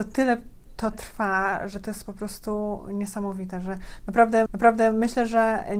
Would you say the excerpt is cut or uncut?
cut